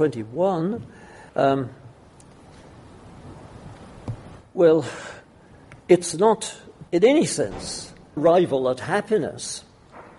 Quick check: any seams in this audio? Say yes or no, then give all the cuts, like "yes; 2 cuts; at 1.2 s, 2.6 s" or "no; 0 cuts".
yes; 4 cuts; at 1.3 s, 5.8 s, 6.9 s, 8.2 s